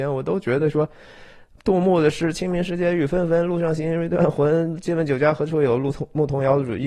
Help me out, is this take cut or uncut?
uncut